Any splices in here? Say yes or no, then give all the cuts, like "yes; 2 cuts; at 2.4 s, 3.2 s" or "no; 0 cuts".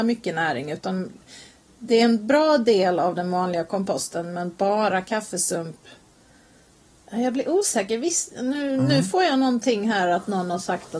no; 0 cuts